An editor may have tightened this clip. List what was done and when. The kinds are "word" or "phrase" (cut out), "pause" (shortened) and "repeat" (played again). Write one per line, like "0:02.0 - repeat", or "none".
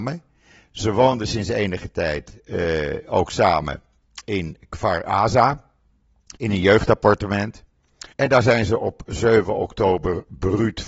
0:06.4 - pause
0:08.1 - pause